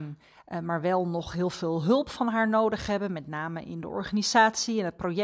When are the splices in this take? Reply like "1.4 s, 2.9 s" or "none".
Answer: none